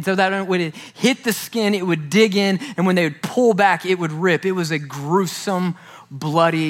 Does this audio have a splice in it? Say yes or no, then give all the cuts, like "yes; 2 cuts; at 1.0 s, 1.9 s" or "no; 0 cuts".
no; 0 cuts